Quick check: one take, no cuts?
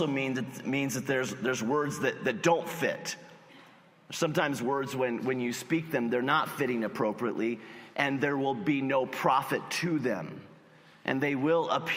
yes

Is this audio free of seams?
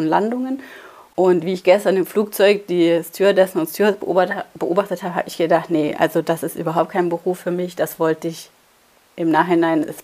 yes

